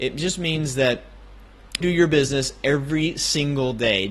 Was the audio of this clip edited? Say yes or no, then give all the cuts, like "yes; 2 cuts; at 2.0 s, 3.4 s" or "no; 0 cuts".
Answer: yes; 1 cut; at 1.8 s